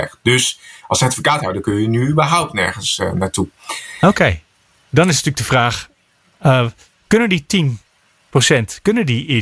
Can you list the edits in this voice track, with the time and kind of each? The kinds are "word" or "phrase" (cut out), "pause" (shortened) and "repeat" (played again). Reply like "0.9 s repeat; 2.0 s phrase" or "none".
none